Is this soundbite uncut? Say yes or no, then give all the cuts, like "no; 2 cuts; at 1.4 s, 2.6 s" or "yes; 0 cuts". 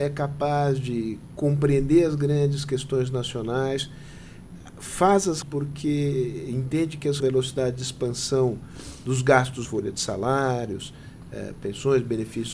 no; 3 cuts; at 5.4 s, 7.2 s, 9.6 s